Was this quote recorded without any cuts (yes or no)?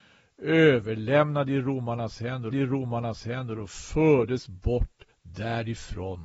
no